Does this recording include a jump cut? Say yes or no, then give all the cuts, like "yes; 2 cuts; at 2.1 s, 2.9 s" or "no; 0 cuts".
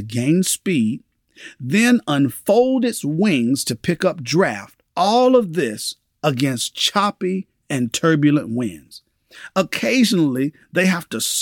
yes; 1 cut; at 4.9 s